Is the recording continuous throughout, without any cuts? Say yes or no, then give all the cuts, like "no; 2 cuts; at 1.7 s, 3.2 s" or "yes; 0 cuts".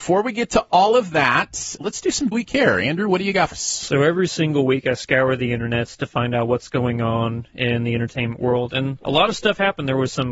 no; 3 cuts; at 1.8 s, 2.3 s, 3.5 s